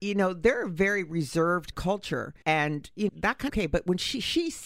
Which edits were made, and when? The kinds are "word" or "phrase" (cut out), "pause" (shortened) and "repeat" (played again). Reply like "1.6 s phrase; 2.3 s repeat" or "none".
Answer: 1.7 s phrase; 2.4 s pause; 3.1 s word; 3.5 s phrase